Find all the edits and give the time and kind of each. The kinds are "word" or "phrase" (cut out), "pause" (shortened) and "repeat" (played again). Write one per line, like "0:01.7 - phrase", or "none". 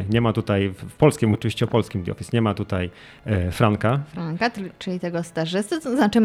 0:01.3 - word